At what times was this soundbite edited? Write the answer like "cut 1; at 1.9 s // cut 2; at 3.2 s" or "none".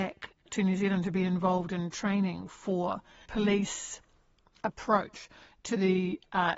cut 1; at 3.3 s